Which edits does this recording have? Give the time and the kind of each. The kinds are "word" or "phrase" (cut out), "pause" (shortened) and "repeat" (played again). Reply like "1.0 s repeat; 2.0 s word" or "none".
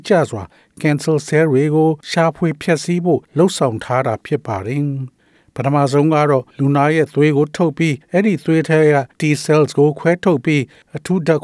2.0 s pause; 3.2 s pause; 6.5 s pause; 8.0 s pause; 9.1 s pause